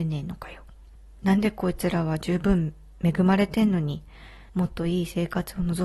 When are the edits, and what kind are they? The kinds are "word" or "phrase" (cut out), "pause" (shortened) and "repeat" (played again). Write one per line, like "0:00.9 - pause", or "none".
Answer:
0:01.0 - pause
0:04.5 - pause